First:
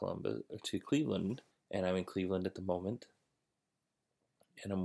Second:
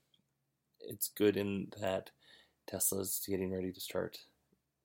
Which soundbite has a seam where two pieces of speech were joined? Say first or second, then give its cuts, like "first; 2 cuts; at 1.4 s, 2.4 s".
first; 1 cut; at 1.5 s